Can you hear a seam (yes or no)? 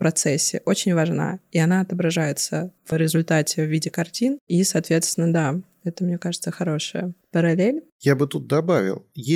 no